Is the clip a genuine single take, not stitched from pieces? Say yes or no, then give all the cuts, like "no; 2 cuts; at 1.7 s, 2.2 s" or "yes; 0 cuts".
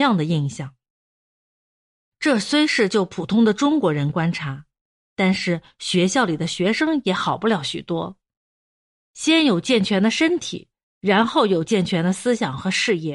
yes; 0 cuts